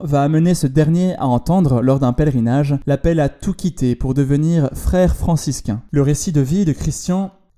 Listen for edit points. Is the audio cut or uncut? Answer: uncut